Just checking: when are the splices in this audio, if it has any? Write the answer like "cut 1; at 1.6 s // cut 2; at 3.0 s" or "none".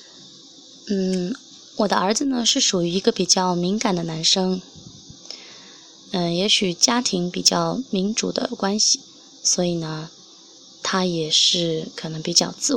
none